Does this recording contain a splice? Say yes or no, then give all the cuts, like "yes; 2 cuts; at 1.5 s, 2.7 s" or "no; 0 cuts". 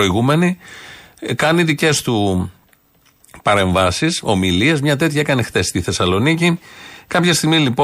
no; 0 cuts